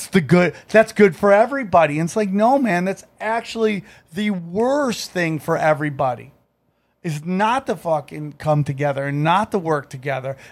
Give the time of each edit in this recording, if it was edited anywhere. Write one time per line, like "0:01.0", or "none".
none